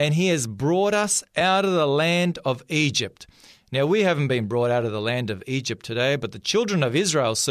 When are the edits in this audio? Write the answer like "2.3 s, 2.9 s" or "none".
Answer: none